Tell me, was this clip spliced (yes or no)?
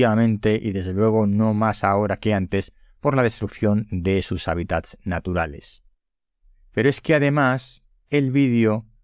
no